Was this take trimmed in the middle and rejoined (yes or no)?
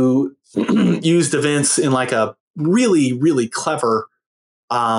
yes